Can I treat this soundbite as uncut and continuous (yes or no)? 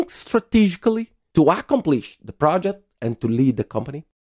yes